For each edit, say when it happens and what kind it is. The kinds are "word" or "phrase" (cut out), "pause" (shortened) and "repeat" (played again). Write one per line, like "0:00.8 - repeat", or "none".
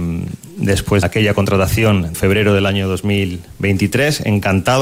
0:01.0 - word
0:02.1 - word